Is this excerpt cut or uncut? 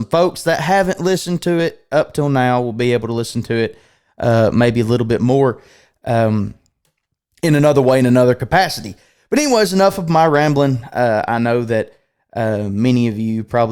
uncut